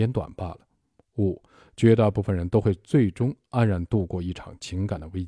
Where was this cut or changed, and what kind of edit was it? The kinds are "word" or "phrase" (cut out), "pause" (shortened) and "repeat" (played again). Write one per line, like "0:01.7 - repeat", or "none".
none